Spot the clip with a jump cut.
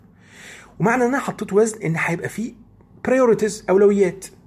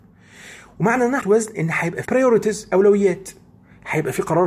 second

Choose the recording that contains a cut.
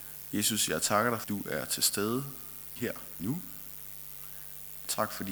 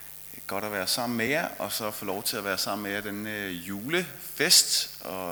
first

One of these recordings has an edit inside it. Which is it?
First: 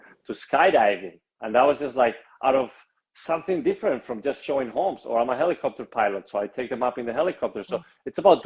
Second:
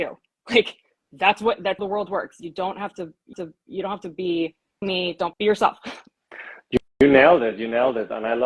second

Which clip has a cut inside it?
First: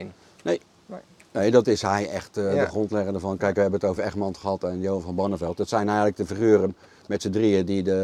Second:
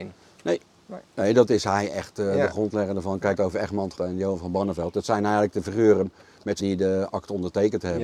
second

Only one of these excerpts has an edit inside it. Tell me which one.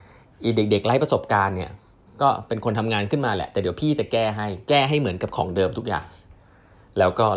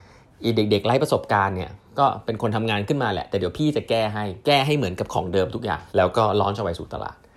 second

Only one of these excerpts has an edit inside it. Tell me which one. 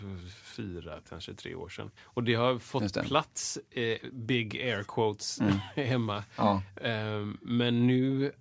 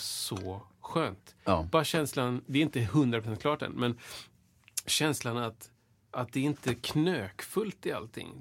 first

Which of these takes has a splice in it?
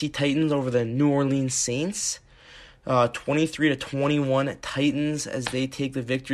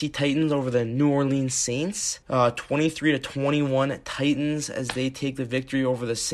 second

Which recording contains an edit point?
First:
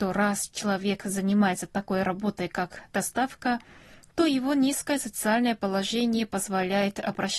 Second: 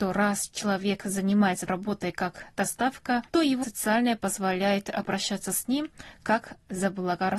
second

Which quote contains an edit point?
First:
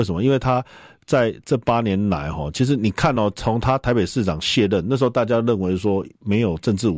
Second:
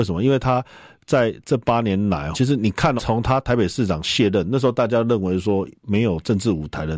second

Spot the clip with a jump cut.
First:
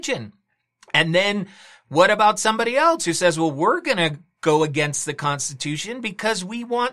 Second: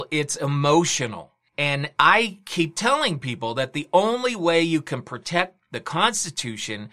second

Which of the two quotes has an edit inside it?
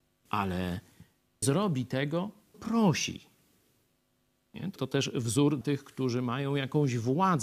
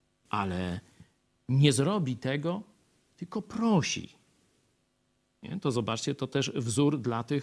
first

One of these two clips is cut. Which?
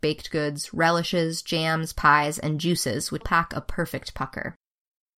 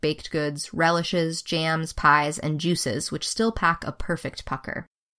first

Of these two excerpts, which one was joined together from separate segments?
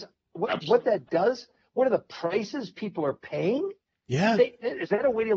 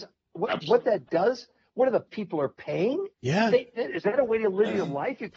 second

